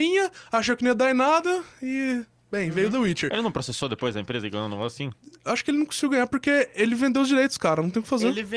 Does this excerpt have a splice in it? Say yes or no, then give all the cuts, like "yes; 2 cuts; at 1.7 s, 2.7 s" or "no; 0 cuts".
no; 0 cuts